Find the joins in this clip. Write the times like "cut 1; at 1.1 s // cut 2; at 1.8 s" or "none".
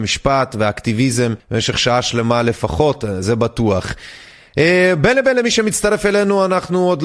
cut 1; at 1.4 s // cut 2; at 3.2 s